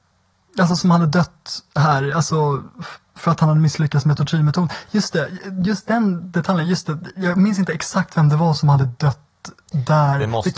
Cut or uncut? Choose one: uncut